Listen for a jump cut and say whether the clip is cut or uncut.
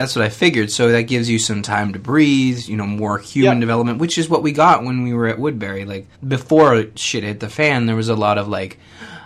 cut